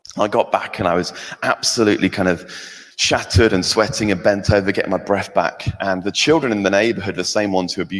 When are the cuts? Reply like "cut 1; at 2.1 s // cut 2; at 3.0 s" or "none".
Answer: cut 1; at 2.9 s